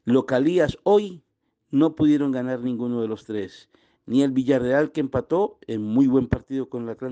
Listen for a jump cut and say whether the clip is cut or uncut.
uncut